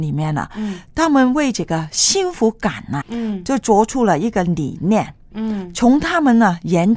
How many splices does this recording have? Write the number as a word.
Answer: one